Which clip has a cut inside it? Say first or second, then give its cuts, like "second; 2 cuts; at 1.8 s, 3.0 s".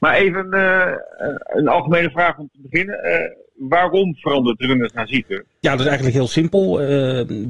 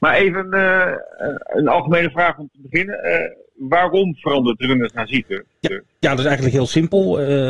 second; 1 cut; at 5.6 s